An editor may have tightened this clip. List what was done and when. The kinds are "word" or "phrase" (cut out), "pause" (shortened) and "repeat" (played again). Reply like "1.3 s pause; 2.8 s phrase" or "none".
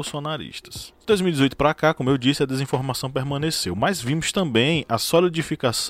none

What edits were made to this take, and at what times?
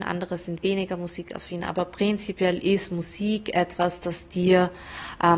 none

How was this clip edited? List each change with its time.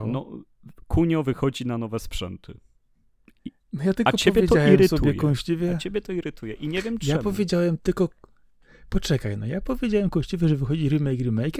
none

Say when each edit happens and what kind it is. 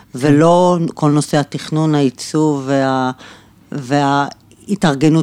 none

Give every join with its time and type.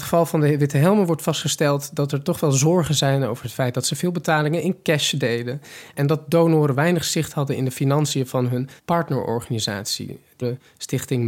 8.8 s pause

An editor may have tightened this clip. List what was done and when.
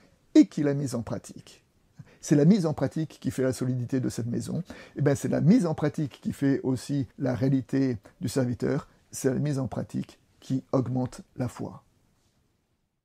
7.1 s pause

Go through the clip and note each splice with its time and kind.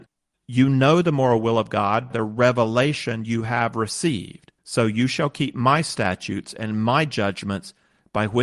2.1 s word; 4.6 s pause

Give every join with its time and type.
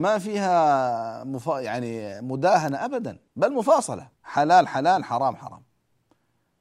3.3 s pause; 4.1 s pause

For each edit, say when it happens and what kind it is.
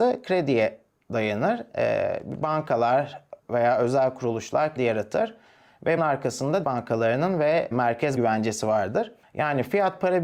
3.4 s pause; 4.8 s word; 6.0 s word; 6.6 s word; 7.7 s word; 8.2 s word

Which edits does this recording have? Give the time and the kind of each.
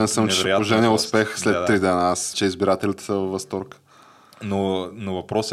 2.3 s word

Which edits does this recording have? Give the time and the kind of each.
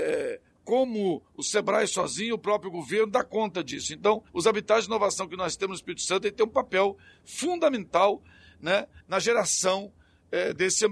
4.3 s pause; 9.0 s pause

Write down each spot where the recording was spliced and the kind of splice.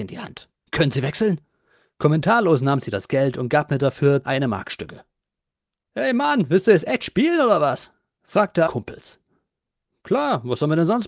4.2 s word; 8.7 s phrase

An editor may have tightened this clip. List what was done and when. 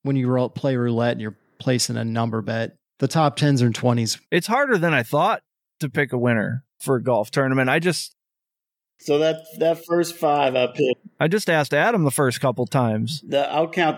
none

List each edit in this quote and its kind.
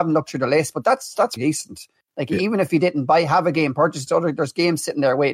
1.4 s word; 4.1 s word

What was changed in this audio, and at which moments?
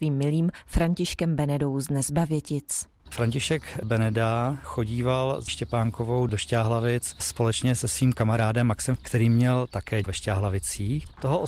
5.5 s word; 9.0 s word; 10.0 s word

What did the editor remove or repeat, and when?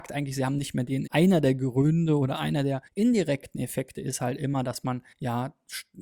1.1 s phrase; 2.9 s pause; 5.1 s pause

